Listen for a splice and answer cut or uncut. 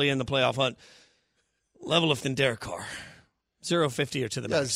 cut